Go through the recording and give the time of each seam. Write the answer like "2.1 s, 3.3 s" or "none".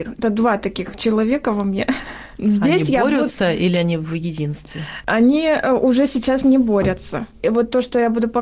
none